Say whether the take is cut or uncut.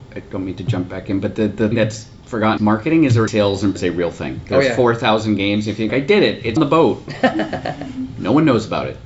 cut